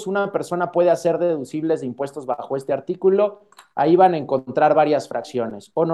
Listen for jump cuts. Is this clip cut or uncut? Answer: uncut